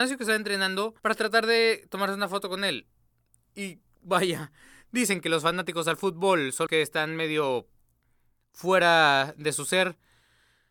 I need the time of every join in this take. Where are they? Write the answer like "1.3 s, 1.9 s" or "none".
1.0 s, 6.7 s